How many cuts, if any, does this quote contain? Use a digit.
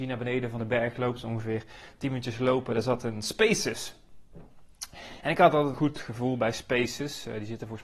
1